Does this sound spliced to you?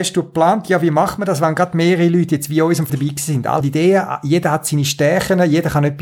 yes; 2 cuts; at 2.9 s, 3.6 s

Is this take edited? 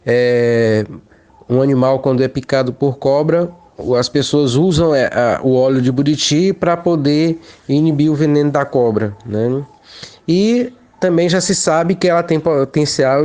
no; 0 cuts

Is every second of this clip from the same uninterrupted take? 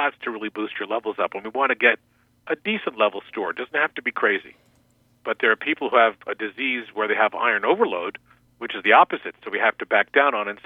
yes; 0 cuts

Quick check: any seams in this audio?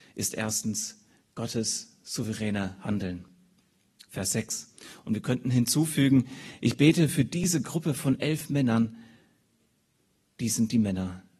no; 0 cuts

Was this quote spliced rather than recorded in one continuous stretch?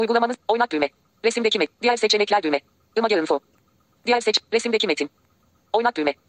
no; 0 cuts

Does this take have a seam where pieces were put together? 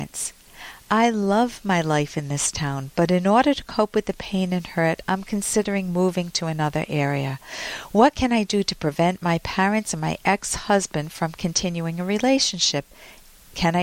no; 0 cuts

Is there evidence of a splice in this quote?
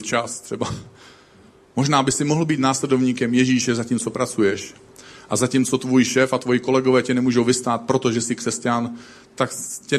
no; 0 cuts

